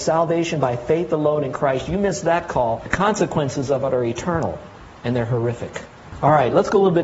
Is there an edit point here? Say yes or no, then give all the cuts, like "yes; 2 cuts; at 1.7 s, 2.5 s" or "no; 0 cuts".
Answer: no; 0 cuts